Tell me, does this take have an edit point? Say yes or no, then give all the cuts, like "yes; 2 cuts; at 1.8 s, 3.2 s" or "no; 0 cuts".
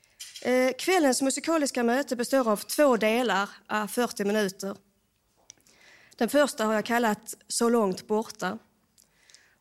no; 0 cuts